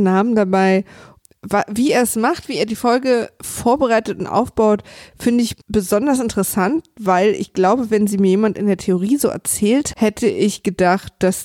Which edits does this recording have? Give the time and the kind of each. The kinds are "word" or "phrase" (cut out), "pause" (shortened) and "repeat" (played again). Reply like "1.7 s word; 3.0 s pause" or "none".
5.6 s pause; 9.9 s word